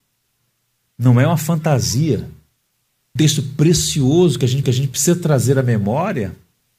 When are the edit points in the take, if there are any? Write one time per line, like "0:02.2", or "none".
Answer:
0:03.2
0:04.6